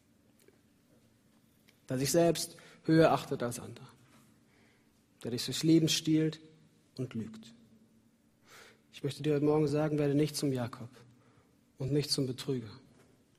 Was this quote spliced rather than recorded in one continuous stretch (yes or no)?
no